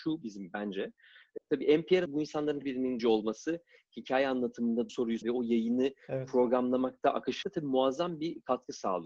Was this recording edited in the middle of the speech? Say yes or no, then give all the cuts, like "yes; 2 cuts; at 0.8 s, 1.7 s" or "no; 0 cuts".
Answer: yes; 7 cuts; at 1.4 s, 2.1 s, 2.6 s, 3.0 s, 4.9 s, 5.2 s, 7.4 s